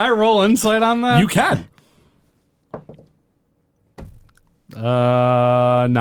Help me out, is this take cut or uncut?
uncut